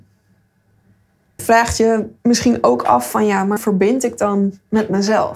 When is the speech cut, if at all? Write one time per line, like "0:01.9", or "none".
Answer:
0:01.4
0:02.2
0:03.6